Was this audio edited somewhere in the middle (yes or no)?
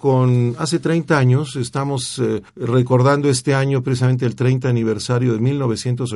yes